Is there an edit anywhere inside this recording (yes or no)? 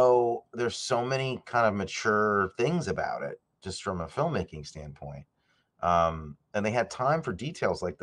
no